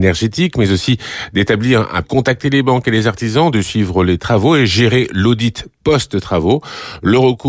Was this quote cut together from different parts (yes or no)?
yes